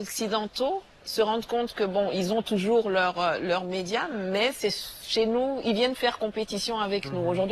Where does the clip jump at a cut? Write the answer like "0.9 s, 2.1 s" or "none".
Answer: none